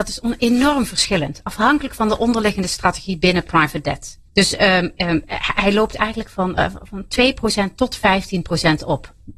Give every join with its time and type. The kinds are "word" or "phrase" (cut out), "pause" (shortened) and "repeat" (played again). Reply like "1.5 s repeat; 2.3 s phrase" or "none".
4.3 s pause